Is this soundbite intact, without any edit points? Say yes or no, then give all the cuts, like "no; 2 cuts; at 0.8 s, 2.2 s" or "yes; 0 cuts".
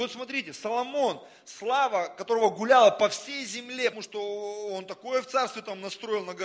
no; 1 cut; at 3.9 s